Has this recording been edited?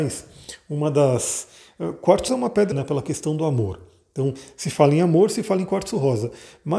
yes; 2 cuts; at 2.3 s, 2.7 s

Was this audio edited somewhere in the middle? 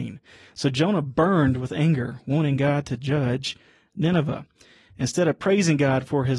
no; 0 cuts

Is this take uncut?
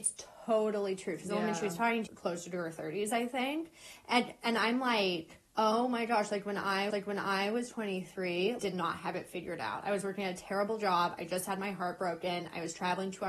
no; 4 cuts; at 2.1 s, 5.5 s, 6.9 s, 8.6 s

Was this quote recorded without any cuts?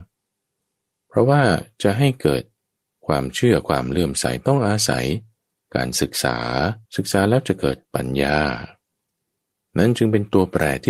no; 2 cuts; at 6.8 s, 7.8 s

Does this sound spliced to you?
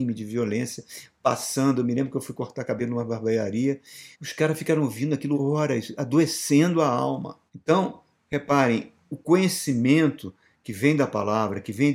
yes; 3 cuts; at 4.1 s, 5.3 s, 7.5 s

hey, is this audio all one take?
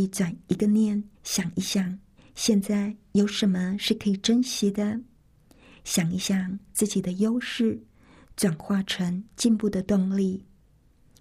no; 2 cuts; at 1.1 s, 2.2 s

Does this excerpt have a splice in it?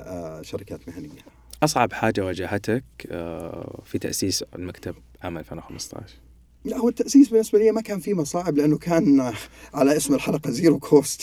no; 0 cuts

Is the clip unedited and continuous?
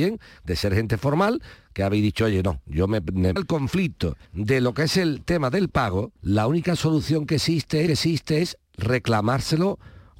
no; 4 cuts; at 3.4 s, 4.2 s, 6.2 s, 7.9 s

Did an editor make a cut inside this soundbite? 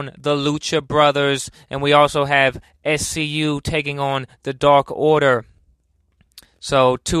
no; 0 cuts

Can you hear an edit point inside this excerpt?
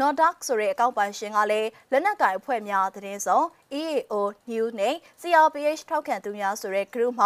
no; 0 cuts

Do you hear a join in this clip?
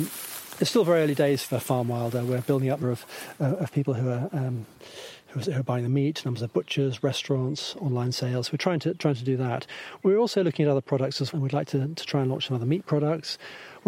yes; 2 cuts; at 2.8 s, 11.3 s

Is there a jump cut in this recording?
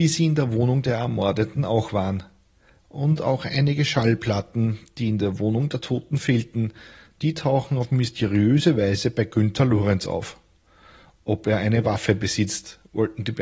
no; 0 cuts

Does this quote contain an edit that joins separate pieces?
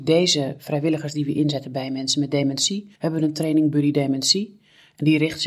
yes; 1 cut; at 3.0 s

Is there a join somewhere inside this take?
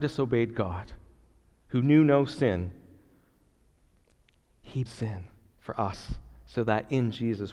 yes; 1 cut; at 4.9 s

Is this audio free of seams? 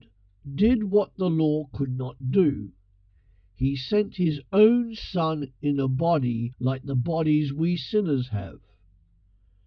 yes; 0 cuts

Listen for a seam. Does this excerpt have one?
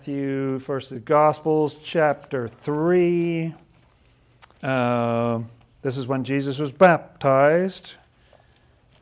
yes; 1 cut; at 4.5 s

